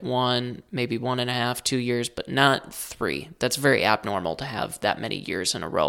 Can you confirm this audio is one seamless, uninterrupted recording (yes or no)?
yes